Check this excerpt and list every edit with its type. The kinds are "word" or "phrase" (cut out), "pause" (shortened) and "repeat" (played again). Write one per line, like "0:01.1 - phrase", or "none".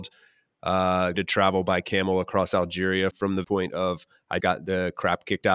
0:01.1 - word
0:03.1 - word
0:03.4 - word
0:04.4 - word

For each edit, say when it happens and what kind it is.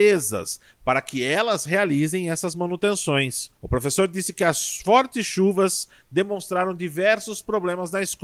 0:03.6 - pause

